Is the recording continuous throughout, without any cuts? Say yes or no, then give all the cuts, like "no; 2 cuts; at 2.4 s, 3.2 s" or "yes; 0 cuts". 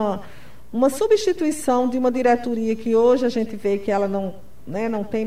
yes; 0 cuts